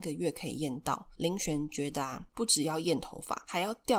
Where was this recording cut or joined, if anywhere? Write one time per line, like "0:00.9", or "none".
0:02.3